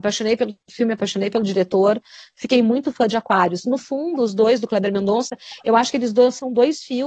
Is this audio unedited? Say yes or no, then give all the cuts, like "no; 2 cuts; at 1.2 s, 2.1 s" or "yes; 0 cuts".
yes; 0 cuts